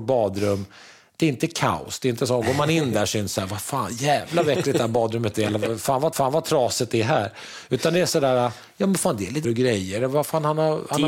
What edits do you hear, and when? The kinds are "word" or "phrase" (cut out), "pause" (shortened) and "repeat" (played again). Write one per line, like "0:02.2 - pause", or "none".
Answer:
0:06.1 - repeat
0:09.4 - word